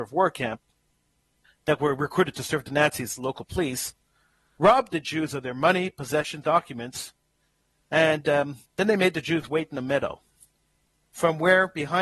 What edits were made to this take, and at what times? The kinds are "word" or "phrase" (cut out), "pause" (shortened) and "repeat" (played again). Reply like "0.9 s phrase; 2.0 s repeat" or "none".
1.4 s word; 6.4 s word; 8.7 s pause